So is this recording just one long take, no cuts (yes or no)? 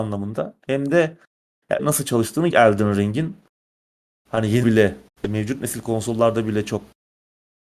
no